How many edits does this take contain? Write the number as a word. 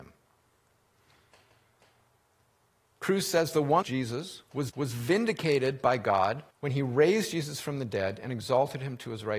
three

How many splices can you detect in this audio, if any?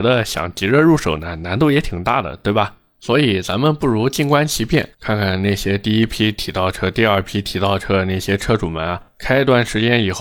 two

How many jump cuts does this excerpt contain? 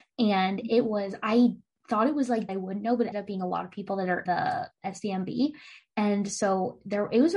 three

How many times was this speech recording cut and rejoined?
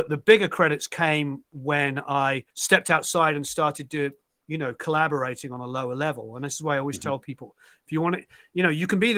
one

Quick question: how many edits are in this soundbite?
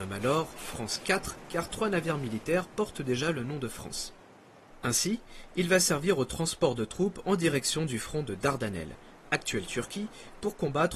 zero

